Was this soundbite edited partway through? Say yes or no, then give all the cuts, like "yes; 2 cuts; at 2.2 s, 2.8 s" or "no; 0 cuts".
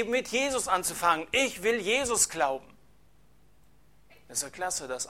no; 0 cuts